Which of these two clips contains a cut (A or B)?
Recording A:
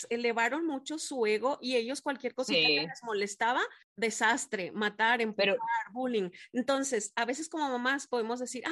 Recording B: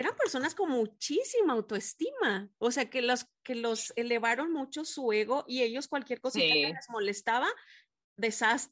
A